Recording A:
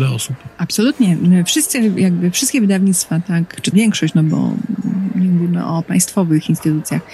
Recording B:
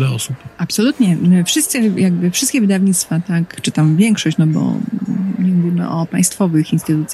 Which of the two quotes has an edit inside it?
A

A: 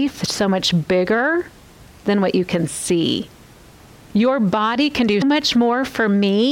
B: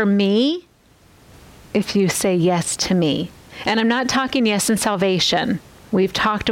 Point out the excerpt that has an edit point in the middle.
A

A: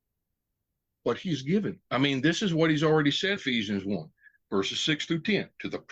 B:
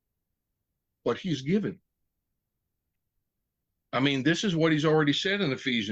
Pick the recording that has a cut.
A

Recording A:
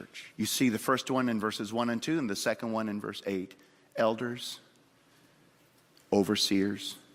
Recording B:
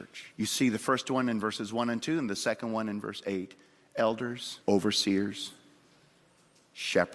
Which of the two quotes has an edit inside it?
B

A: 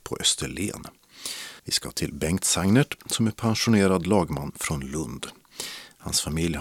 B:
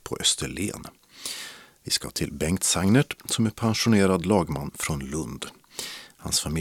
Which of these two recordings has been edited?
A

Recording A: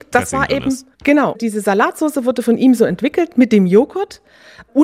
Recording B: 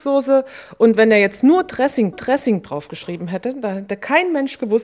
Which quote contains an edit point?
B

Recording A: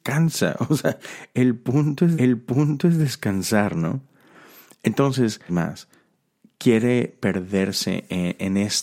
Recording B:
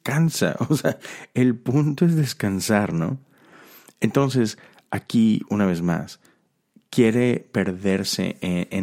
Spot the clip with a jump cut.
A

